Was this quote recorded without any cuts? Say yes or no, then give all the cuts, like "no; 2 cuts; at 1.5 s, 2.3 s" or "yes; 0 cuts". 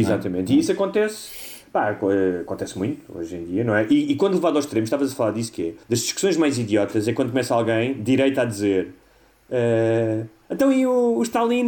no; 1 cut; at 5.8 s